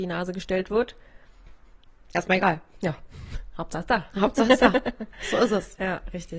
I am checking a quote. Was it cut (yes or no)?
no